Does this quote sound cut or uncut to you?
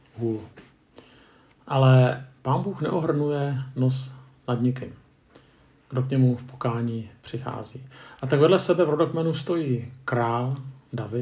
uncut